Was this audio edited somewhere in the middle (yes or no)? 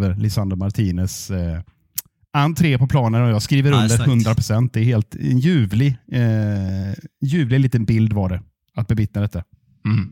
no